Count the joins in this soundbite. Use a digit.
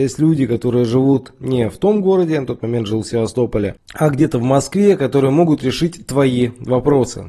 0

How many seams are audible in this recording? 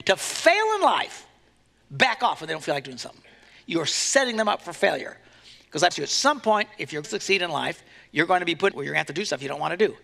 3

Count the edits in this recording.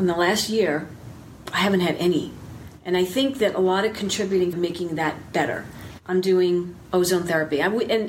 1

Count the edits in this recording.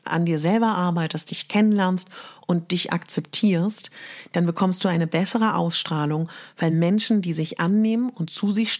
0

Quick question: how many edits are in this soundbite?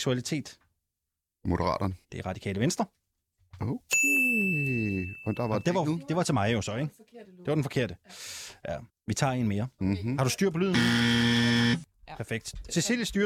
2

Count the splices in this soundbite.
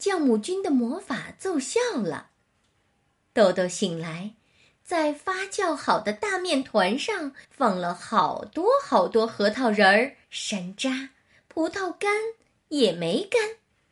2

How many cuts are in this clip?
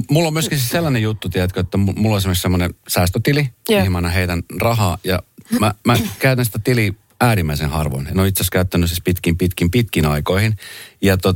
0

